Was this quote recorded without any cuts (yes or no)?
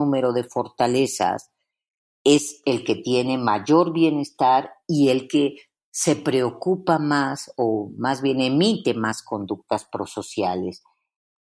yes